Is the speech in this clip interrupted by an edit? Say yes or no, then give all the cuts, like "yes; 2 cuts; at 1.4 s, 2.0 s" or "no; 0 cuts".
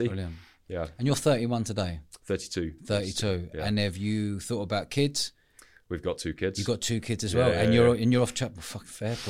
no; 0 cuts